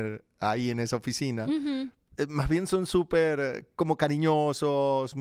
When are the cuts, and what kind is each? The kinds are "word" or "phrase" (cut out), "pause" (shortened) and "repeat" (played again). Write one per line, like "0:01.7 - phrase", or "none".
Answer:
none